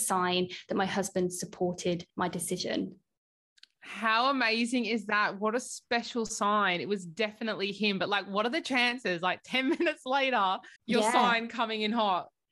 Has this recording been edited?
yes; 2 cuts; at 2.1 s, 10.8 s

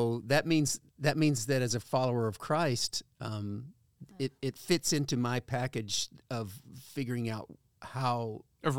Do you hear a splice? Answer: no; 0 cuts

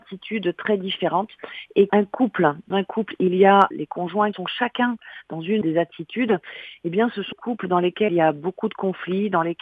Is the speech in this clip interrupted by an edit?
yes; 7 cuts; at 1.9 s, 2.7 s, 3.7 s, 4.3 s, 5.6 s, 7.3 s, 8.1 s

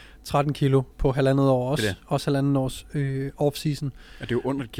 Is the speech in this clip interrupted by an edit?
yes; 1 cut; at 0.9 s

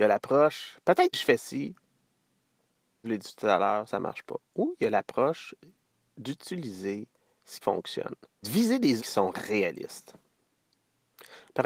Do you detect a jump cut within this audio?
yes; 6 cuts; at 1.1 s, 3.0 s, 3.9 s, 7.6 s, 8.4 s, 9.0 s

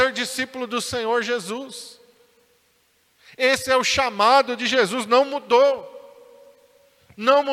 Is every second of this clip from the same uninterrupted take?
yes; 0 cuts

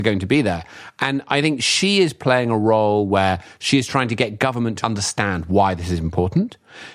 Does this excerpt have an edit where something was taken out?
yes; 1 cut; at 4.8 s

